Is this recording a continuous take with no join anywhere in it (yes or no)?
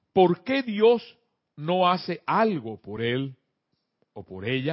yes